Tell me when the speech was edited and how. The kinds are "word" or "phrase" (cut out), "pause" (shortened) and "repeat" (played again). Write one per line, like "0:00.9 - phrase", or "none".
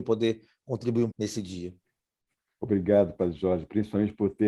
0:01.1 - word